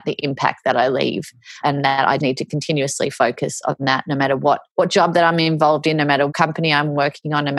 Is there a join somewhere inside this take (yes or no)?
yes